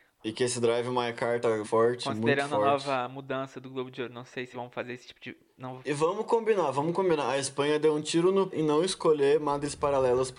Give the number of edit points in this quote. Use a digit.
3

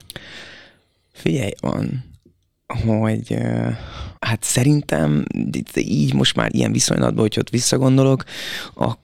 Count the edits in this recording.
3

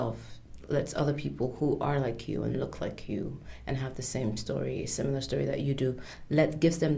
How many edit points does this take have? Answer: 0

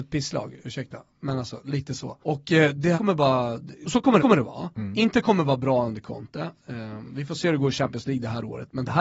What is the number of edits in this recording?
4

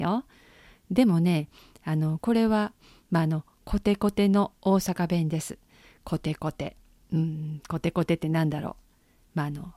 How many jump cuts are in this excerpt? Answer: 0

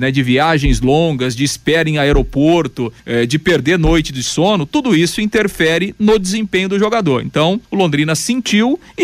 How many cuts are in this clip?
2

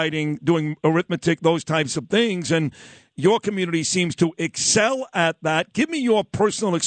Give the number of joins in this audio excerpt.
0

